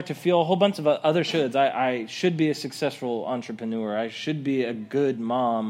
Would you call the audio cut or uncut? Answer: uncut